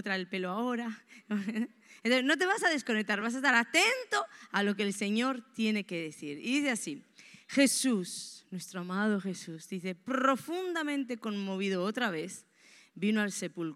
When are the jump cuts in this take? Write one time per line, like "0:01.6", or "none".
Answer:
none